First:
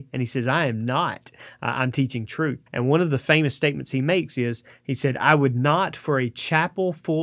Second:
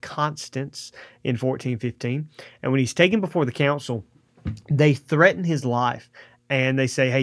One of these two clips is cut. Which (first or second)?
first